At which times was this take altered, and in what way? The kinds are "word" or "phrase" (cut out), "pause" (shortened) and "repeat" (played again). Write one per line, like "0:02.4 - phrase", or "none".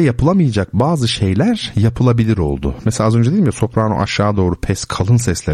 none